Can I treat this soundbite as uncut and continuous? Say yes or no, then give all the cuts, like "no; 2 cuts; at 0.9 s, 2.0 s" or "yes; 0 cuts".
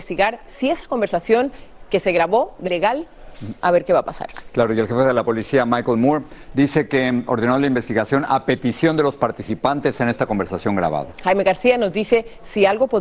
no; 1 cut; at 2.6 s